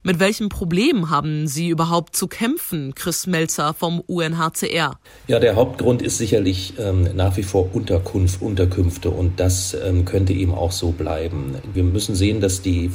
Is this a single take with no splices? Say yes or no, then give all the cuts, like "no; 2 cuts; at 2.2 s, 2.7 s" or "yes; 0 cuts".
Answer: yes; 0 cuts